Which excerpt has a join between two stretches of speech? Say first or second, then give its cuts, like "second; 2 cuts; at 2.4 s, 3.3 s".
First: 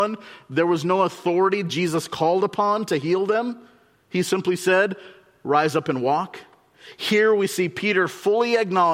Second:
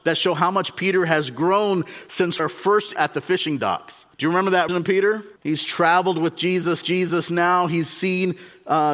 second; 6 cuts; at 2.4 s, 3.0 s, 4.1 s, 4.7 s, 5.4 s, 6.8 s